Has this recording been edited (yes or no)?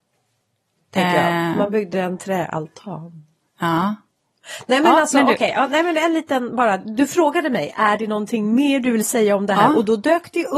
no